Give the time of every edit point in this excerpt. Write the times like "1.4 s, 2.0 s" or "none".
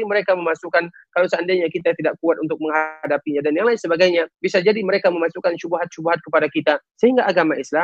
4.3 s, 6.9 s